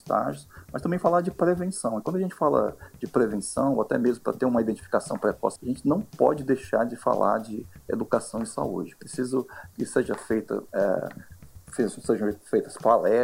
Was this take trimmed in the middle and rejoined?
yes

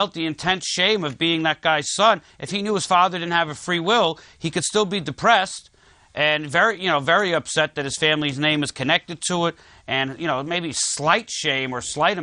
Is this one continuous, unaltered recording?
yes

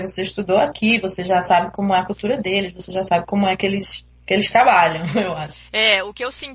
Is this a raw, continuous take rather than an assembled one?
yes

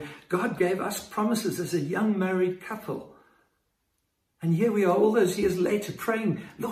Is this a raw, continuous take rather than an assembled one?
yes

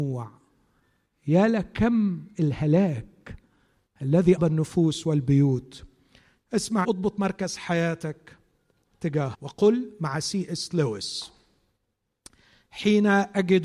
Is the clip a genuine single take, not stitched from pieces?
no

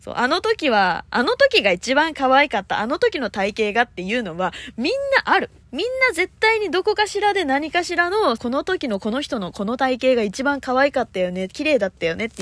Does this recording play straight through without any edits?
no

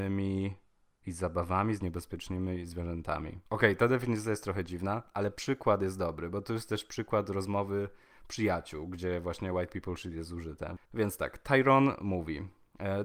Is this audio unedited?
no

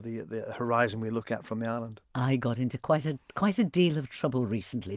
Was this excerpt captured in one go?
no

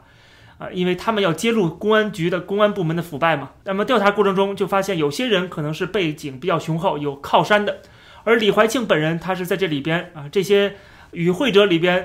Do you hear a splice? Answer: no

